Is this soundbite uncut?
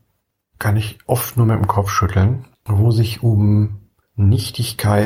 no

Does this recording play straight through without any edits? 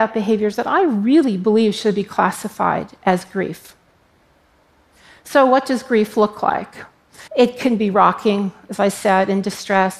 no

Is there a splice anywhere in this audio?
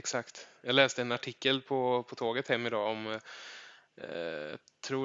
no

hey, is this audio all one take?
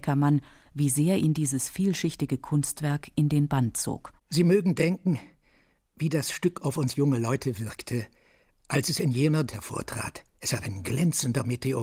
no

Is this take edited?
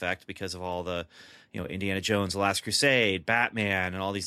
no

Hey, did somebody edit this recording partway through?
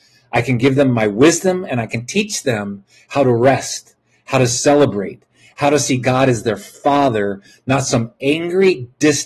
no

